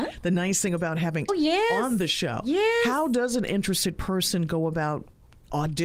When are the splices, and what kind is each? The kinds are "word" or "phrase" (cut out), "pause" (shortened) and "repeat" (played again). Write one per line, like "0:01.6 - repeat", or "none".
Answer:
0:01.3 - word